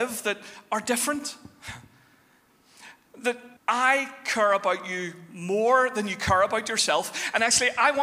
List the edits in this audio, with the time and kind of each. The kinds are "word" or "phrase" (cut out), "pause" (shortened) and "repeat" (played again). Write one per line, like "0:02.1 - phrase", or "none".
0:03.6 - pause